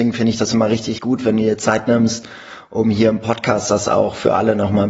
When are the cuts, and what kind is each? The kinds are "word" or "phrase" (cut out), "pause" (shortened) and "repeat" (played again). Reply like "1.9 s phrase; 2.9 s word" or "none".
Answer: 1.0 s word